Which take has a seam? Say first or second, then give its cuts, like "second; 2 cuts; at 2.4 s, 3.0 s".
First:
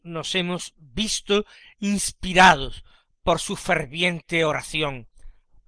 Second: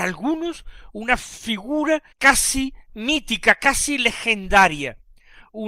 second; 1 cut; at 2.1 s